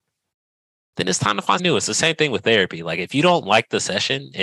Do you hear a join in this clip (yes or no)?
yes